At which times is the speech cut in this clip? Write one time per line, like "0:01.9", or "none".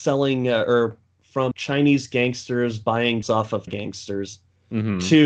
0:01.5
0:03.2
0:03.7